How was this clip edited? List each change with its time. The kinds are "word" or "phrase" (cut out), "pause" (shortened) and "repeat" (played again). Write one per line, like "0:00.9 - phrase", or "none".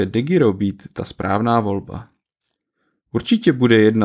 none

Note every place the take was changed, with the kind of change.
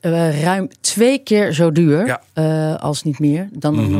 0:02.3 - pause

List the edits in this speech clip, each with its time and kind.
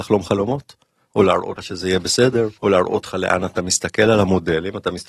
0:01.6 - word
0:02.6 - pause
0:03.6 - phrase

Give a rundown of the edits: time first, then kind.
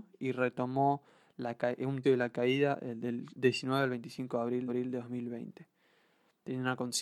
0:02.0 - word
0:04.7 - repeat

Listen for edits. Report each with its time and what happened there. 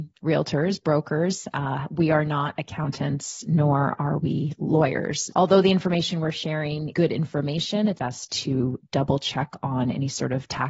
0:05.3 - word
0:06.9 - word
0:08.0 - word

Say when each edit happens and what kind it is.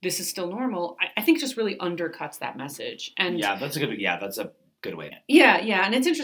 0:05.1 - word

